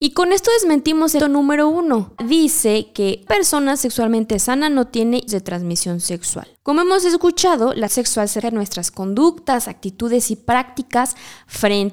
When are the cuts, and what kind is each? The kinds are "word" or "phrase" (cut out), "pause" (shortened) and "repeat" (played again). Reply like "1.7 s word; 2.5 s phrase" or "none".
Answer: 1.2 s word; 2.2 s pause; 3.3 s word; 5.3 s word; 6.6 s pause; 7.9 s word; 8.4 s word